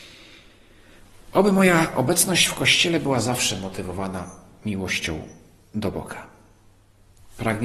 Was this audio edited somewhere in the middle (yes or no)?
no